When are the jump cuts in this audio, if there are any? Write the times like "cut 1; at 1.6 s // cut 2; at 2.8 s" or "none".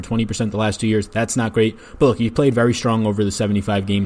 none